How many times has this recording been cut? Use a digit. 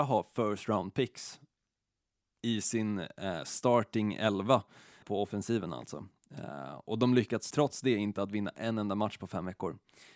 2